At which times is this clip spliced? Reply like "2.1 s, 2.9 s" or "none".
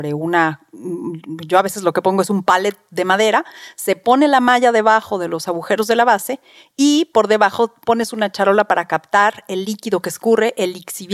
none

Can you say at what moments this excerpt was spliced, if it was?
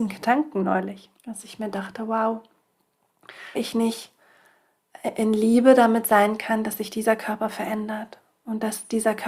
1.2 s, 3.5 s

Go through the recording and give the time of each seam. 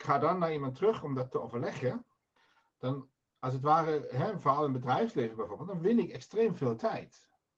2.4 s

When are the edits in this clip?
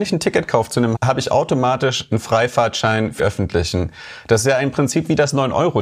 0.9 s, 3.2 s

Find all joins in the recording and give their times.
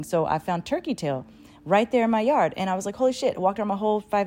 none

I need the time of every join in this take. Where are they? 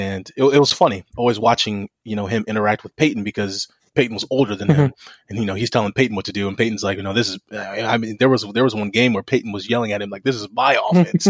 none

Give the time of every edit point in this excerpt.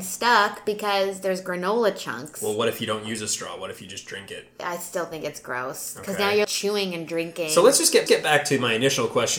6.4 s, 8.1 s

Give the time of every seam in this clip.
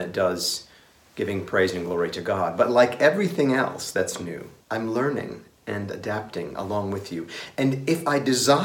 4.6 s

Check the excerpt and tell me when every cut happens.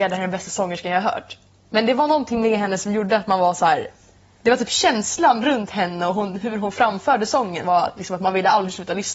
7.6 s

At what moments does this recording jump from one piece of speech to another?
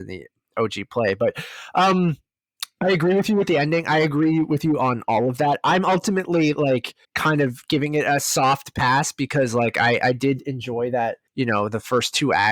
7.0 s, 11.3 s

